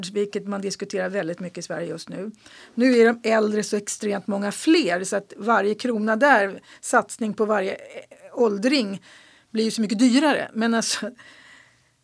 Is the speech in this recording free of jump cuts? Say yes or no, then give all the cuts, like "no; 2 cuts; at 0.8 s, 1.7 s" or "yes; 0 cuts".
yes; 0 cuts